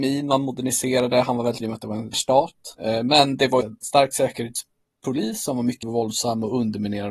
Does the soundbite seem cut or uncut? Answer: cut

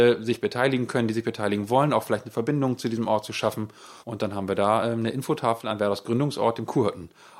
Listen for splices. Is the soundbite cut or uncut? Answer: cut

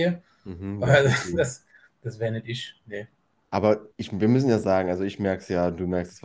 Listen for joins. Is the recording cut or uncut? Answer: uncut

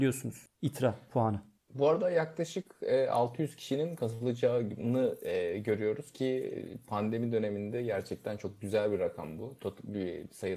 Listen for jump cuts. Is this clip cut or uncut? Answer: uncut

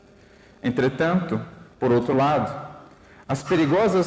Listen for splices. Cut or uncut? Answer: uncut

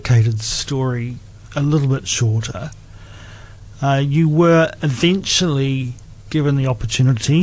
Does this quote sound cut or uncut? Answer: cut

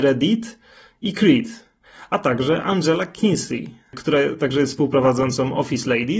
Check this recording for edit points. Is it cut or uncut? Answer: uncut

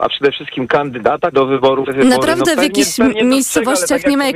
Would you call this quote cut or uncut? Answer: cut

